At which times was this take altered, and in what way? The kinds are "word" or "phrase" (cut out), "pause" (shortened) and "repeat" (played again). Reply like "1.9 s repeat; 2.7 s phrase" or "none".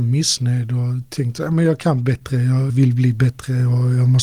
2.7 s word